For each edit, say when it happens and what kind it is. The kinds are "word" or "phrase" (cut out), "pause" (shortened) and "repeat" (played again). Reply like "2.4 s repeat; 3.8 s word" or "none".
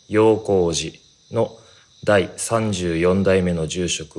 none